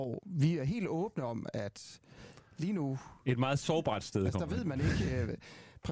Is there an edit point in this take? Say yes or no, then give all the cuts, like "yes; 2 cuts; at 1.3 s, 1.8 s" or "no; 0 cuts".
no; 0 cuts